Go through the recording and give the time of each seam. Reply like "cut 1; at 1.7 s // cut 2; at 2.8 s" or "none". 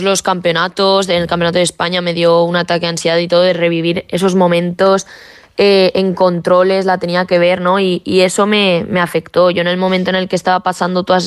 none